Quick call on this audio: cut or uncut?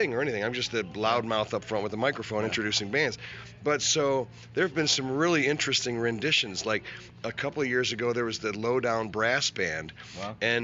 uncut